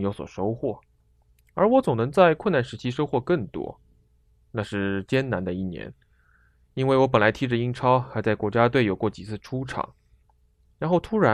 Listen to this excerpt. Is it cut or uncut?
uncut